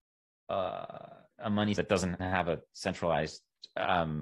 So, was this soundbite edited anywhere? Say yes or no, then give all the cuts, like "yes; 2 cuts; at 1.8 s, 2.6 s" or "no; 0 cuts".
yes; 3 cuts; at 1.3 s, 1.8 s, 2.2 s